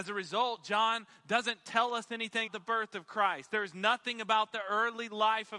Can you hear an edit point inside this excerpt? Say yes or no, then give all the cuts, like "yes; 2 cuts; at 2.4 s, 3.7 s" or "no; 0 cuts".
yes; 1 cut; at 2.5 s